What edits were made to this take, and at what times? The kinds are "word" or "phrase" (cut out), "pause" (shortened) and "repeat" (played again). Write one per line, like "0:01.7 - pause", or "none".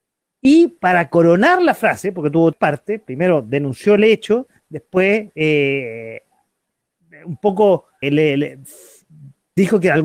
0:02.5 - word
0:08.0 - word